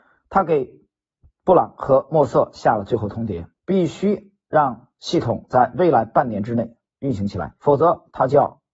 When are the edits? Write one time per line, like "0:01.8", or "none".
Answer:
0:03.6
0:07.6